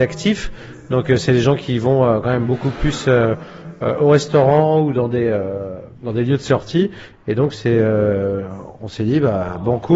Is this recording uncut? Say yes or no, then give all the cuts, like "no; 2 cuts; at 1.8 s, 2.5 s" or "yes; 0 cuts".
no; 1 cut; at 5.9 s